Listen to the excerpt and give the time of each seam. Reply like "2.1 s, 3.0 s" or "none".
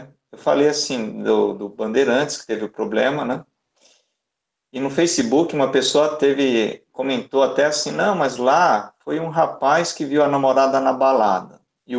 none